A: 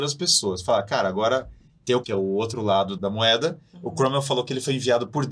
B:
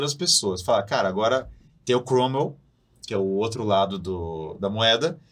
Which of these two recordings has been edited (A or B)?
A